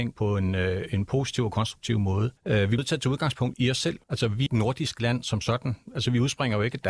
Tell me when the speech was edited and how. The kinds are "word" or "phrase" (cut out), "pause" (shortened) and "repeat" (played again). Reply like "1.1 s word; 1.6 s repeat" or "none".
2.4 s pause; 2.8 s word; 3.5 s word; 4.0 s pause; 4.5 s phrase